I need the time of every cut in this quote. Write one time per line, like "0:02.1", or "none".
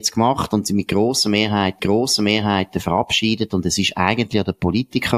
0:01.8